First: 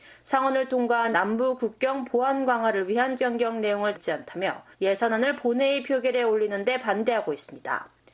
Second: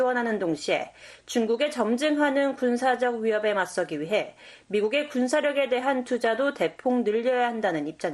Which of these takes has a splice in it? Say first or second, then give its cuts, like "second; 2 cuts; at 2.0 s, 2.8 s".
first; 4 cuts; at 1.1 s, 3.2 s, 3.9 s, 4.7 s